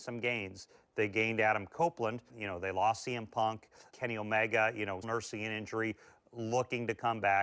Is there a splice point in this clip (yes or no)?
yes